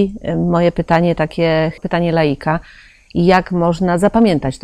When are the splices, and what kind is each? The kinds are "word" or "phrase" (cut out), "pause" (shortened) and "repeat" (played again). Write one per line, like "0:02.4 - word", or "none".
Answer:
0:01.8 - phrase

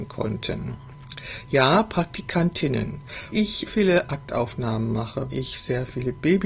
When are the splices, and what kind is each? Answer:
0:03.3 - word
0:03.7 - word
0:05.3 - word

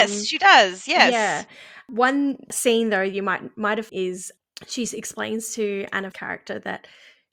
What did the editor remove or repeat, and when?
0:03.9 - word
0:06.1 - word

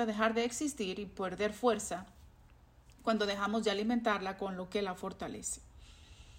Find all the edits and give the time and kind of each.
none

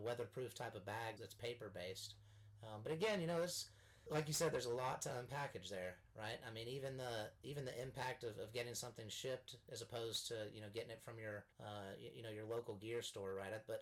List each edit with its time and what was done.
0:01.2 - word
0:11.5 - pause

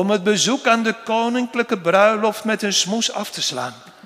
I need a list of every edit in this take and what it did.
none

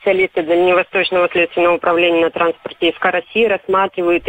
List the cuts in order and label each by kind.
none

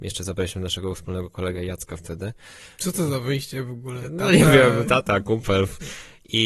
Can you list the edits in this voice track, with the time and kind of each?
none

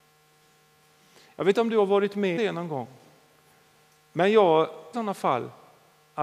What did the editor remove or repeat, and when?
0:01.5 - word
0:02.4 - word
0:04.9 - phrase

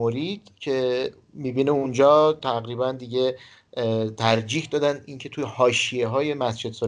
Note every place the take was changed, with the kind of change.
none

